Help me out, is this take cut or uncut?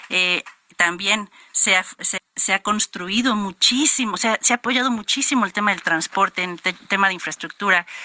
cut